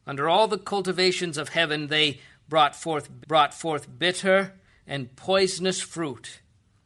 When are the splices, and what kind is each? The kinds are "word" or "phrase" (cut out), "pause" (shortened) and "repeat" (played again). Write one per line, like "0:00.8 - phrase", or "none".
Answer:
0:03.2 - repeat